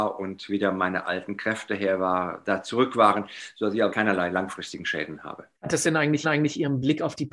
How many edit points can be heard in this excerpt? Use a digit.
3